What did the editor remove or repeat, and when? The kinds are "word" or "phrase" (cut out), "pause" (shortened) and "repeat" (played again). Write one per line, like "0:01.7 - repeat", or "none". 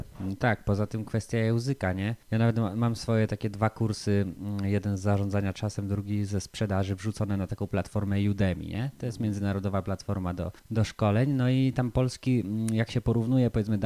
0:02.2 - pause
0:10.6 - pause